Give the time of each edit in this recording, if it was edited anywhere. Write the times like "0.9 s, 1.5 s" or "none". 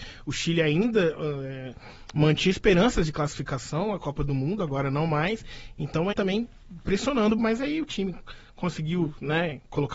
6.1 s, 7.4 s